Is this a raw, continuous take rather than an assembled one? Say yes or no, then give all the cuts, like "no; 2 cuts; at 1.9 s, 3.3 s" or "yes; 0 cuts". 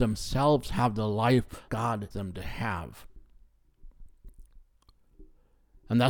no; 2 cuts; at 1.7 s, 2.1 s